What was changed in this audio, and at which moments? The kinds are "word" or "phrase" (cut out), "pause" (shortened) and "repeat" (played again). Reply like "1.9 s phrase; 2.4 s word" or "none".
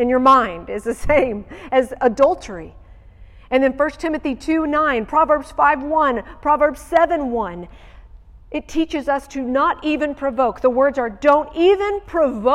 none